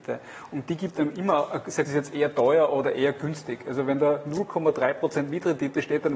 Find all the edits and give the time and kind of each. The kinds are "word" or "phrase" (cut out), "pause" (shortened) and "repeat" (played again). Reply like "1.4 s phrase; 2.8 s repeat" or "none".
1.9 s phrase